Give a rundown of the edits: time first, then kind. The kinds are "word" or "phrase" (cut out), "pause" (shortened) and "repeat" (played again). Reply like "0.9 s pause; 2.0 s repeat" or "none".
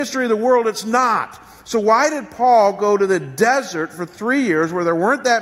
none